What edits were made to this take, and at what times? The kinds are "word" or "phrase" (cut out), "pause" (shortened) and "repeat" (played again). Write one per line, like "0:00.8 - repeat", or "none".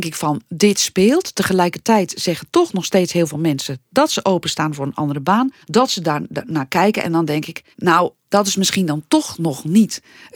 0:05.6 - pause
0:07.7 - pause